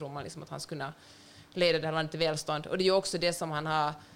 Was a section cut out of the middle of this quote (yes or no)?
no